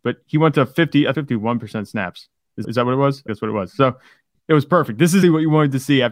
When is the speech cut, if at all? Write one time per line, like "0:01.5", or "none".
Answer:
0:01.1
0:02.6
0:03.3
0:05.2